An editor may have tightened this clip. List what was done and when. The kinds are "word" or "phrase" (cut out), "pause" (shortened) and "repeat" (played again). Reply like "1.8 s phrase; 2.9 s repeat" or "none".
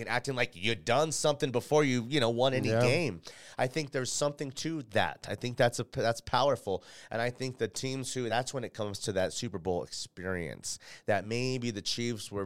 none